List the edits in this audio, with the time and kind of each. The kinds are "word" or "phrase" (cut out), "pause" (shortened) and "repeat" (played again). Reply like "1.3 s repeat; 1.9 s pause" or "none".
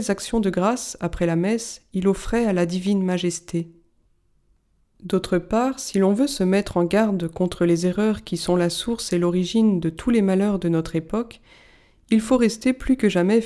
none

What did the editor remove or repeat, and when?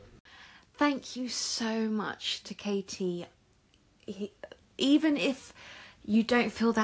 none

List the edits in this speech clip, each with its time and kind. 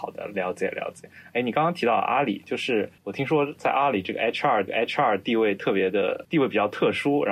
3.0 s pause; 4.7 s repeat; 6.2 s phrase

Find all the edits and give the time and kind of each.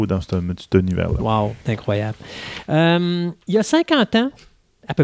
1.6 s pause; 3.4 s pause

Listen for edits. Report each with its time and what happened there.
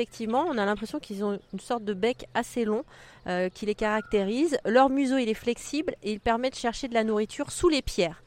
none

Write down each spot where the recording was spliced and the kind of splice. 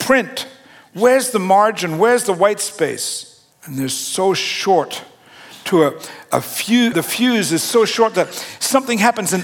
3.5 s pause; 6.9 s word

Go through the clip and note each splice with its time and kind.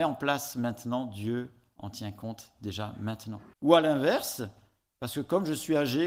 3.5 s pause

